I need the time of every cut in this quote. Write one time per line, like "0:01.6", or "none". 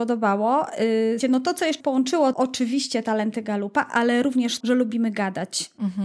0:01.2
0:01.8
0:02.3
0:04.6